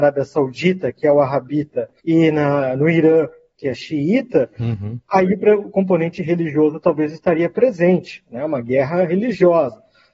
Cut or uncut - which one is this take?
uncut